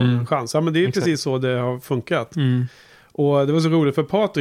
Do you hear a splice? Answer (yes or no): no